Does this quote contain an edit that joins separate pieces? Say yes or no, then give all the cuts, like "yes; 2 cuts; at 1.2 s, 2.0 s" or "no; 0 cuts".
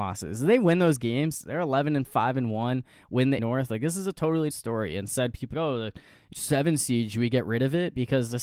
yes; 4 cuts; at 3.4 s, 4.5 s, 5.5 s, 6.3 s